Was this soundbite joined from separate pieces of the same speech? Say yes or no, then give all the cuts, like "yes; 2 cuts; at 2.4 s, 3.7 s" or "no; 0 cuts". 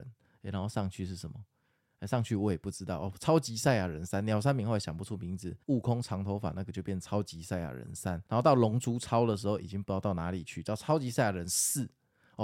yes; 2 cuts; at 5.6 s, 8.3 s